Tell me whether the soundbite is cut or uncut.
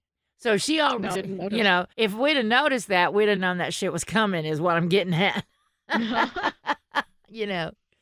cut